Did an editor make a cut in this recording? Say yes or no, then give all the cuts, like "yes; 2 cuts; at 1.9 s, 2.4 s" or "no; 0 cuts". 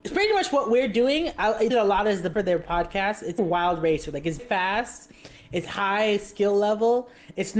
yes; 4 cuts; at 1.7 s, 2.3 s, 3.4 s, 4.4 s